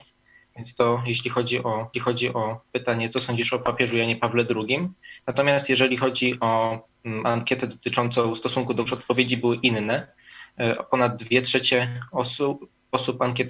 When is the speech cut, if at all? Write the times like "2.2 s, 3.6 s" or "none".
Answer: 1.9 s, 8.9 s